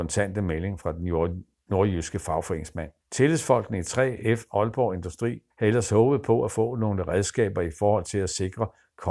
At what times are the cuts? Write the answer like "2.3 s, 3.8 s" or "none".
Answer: 3.0 s, 5.5 s